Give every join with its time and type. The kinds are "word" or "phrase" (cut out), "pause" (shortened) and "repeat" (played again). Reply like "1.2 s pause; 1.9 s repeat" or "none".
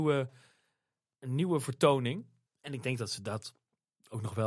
2.5 s pause